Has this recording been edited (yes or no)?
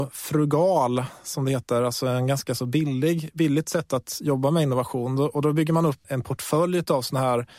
yes